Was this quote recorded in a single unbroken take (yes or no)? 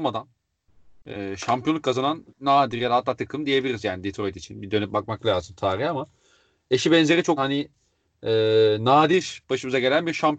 no